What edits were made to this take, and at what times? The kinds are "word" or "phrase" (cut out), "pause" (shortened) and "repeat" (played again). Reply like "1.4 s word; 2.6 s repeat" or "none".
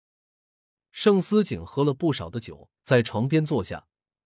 2.8 s pause